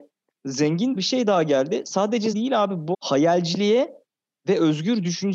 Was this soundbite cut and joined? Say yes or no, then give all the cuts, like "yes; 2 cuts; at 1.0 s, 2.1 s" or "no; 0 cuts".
yes; 3 cuts; at 1.0 s, 2.3 s, 2.9 s